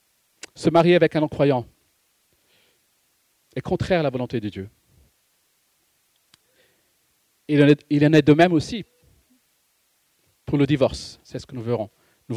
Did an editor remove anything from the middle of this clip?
no; 0 cuts

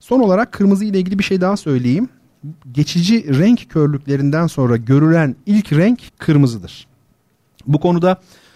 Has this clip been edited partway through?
yes; 1 cut; at 6.1 s

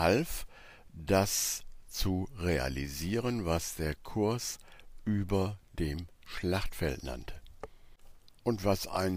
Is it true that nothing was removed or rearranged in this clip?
yes; 0 cuts

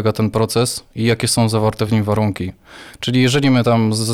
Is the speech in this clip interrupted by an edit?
no; 0 cuts

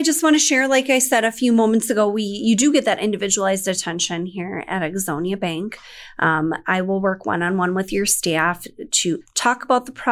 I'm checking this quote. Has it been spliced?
no; 0 cuts

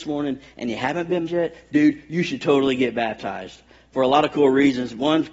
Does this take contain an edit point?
yes; 1 cut; at 1.3 s

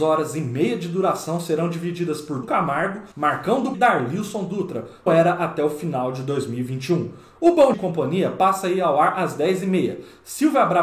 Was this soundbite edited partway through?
yes; 5 cuts; at 2.4 s, 3.1 s, 3.7 s, 5.1 s, 7.7 s

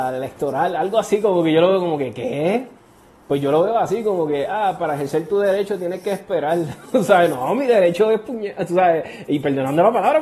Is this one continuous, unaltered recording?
yes; 0 cuts

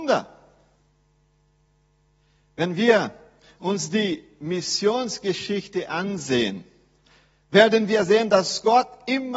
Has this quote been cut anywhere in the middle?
no; 0 cuts

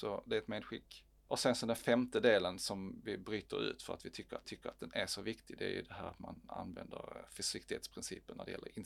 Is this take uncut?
no; 1 cut; at 4.4 s

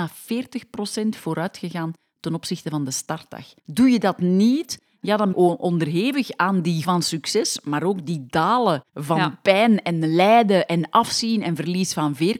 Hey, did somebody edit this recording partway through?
yes; 3 cuts; at 5.3 s, 6.8 s, 8.9 s

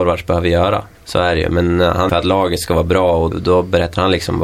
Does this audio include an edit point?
yes; 3 cuts; at 0.9 s, 2.1 s, 3.3 s

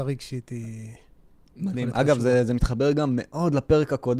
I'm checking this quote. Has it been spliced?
no; 0 cuts

